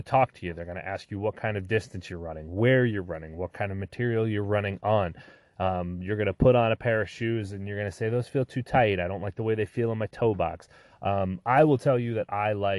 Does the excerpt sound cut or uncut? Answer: uncut